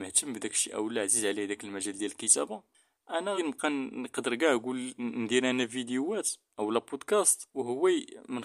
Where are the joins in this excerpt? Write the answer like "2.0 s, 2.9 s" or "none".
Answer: 3.4 s